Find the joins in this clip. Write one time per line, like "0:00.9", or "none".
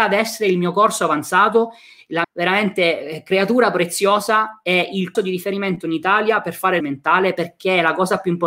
0:02.2
0:05.1
0:06.8